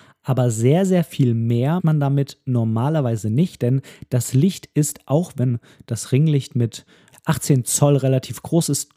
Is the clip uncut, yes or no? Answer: no